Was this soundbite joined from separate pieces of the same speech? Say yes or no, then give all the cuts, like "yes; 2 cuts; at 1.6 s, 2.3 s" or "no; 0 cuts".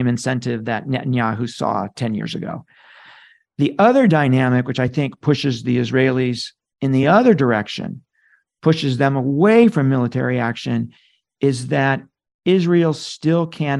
no; 0 cuts